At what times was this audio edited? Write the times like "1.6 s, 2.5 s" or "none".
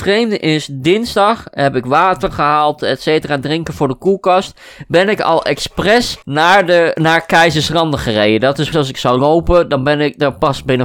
6.2 s, 8.7 s